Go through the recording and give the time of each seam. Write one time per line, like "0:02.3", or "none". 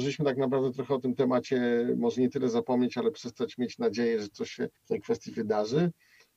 0:04.8

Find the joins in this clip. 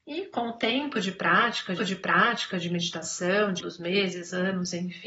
0:01.8
0:03.6

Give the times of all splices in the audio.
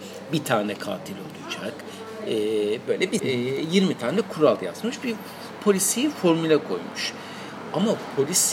0:02.9
0:03.2

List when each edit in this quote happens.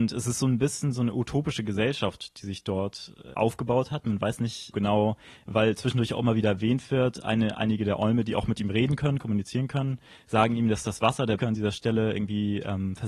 0:03.3
0:04.7
0:11.4

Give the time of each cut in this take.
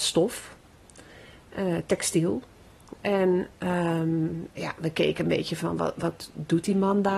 0:04.5

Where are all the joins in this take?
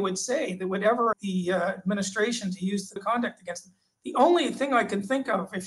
0:01.1
0:03.0

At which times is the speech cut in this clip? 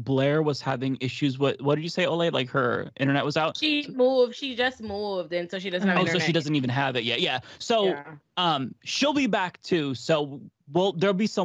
none

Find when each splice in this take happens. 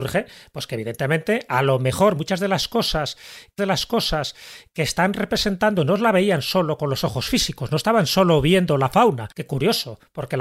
0:03.6
0:09.3

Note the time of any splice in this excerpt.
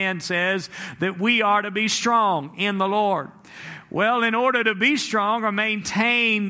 none

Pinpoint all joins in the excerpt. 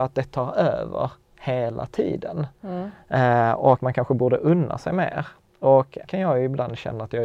0:03.8
0:06.0

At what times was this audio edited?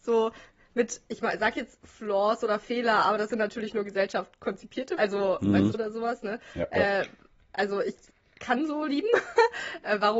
0:05.0
0:05.7

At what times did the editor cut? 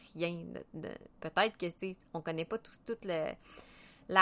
0:01.1

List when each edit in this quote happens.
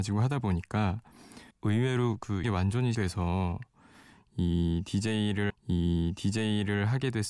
0:01.5
0:02.4
0:02.9
0:05.5

